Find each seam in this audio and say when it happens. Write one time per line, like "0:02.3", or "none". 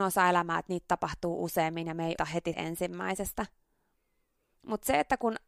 0:02.2
0:02.5